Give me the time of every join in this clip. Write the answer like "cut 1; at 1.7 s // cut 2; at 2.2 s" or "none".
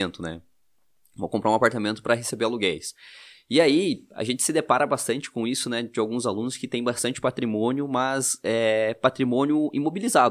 none